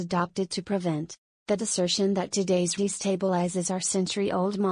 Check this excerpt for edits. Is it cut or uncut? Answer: cut